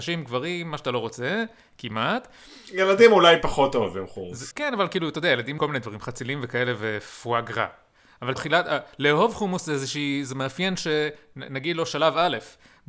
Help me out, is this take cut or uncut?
cut